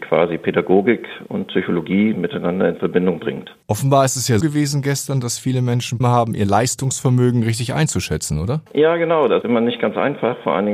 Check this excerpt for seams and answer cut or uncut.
cut